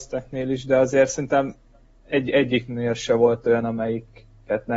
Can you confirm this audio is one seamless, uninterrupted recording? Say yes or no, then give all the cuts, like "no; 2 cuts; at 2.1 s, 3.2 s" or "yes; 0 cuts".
yes; 0 cuts